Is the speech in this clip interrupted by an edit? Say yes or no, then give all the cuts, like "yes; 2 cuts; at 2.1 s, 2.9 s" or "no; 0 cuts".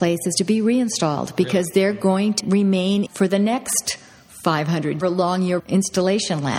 yes; 4 cuts; at 2.4 s, 3.1 s, 5.0 s, 5.6 s